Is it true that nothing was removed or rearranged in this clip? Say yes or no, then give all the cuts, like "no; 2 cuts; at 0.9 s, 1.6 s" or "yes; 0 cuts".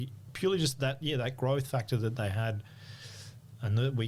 yes; 0 cuts